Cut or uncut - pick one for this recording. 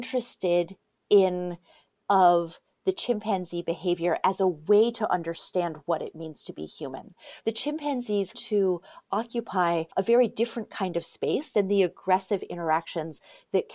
cut